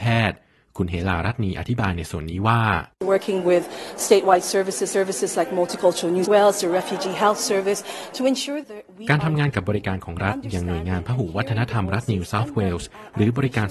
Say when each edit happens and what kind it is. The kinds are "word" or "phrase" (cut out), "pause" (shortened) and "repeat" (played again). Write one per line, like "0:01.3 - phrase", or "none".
0:02.9 - pause
0:04.9 - repeat
0:06.3 - word
0:08.6 - word